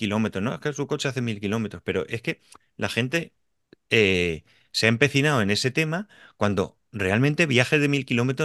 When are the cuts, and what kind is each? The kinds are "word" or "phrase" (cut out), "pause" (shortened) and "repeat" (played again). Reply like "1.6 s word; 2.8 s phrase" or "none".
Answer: none